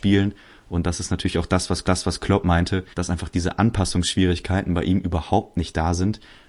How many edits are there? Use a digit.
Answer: 2